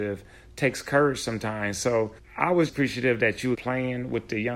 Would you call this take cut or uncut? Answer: cut